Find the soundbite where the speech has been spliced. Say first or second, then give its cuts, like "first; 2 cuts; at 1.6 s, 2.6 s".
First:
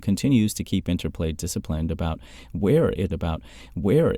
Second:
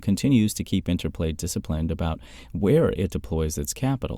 first; 1 cut; at 3.1 s